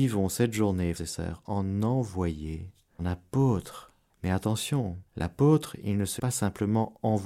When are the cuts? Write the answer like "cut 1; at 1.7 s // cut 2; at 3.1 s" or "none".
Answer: cut 1; at 0.9 s // cut 2; at 3.0 s // cut 3; at 4.1 s // cut 4; at 5.1 s // cut 5; at 6.2 s